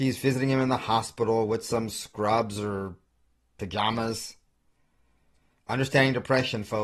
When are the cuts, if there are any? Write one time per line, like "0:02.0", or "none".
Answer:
none